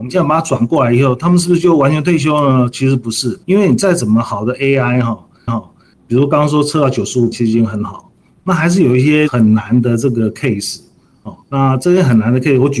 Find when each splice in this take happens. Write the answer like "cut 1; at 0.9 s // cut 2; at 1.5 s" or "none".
cut 1; at 3.4 s // cut 2; at 5.5 s // cut 3; at 7.3 s // cut 4; at 11.4 s